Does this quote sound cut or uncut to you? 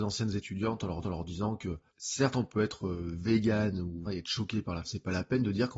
cut